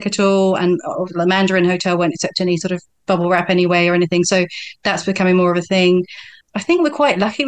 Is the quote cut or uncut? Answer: cut